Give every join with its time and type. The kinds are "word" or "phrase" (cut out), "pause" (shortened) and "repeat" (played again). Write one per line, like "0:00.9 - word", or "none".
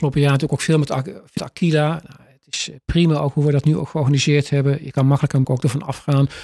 0:01.4 - word
0:05.4 - phrase